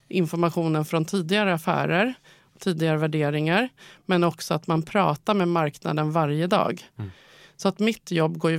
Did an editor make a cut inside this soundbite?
no; 0 cuts

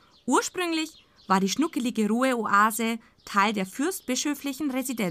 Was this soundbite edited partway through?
no; 0 cuts

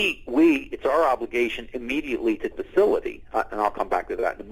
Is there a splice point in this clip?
yes; 1 cut; at 2.5 s

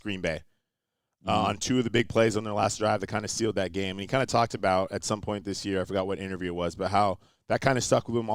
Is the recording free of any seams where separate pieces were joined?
yes; 0 cuts

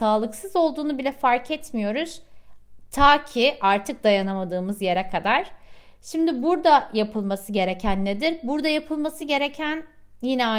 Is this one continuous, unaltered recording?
yes; 0 cuts

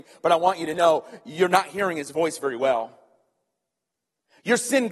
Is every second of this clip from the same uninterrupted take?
yes; 0 cuts

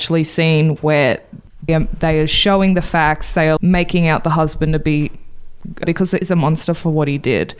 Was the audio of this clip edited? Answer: yes; 4 cuts; at 1.7 s, 3.6 s, 5.8 s, 6.2 s

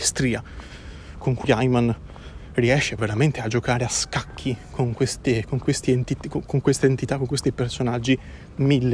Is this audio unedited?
no; 2 cuts; at 1.4 s, 3.0 s

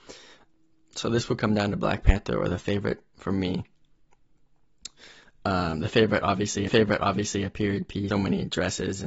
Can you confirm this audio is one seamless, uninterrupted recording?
no; 2 cuts; at 6.7 s, 8.1 s

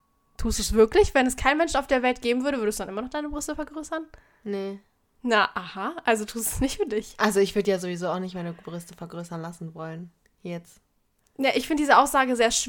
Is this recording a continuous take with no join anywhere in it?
yes; 0 cuts

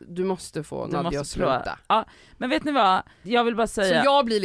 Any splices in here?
yes; 1 cut; at 3.2 s

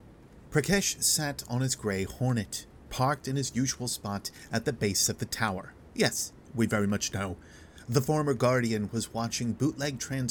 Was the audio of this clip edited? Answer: no; 0 cuts

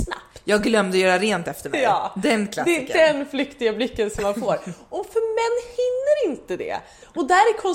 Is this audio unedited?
yes; 0 cuts

